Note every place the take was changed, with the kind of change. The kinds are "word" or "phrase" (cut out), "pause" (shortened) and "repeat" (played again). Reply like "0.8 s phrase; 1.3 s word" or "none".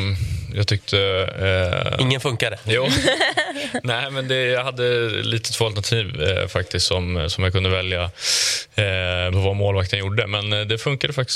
9.3 s word